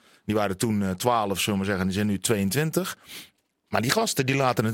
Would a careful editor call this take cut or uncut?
uncut